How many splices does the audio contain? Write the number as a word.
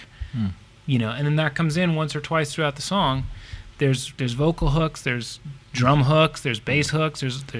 one